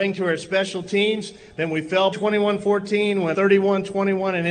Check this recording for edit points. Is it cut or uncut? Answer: cut